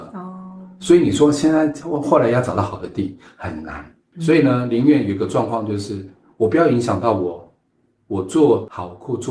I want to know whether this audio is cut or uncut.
uncut